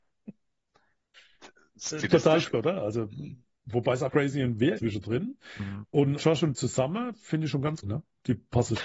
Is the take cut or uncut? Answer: cut